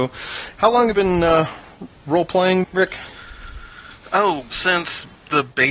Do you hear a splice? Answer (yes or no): yes